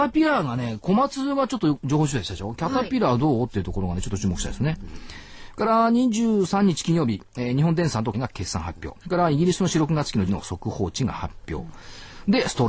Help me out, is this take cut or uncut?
cut